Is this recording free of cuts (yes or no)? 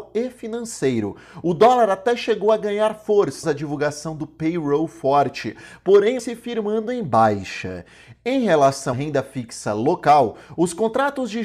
no